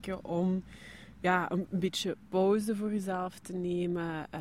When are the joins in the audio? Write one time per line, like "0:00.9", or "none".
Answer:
none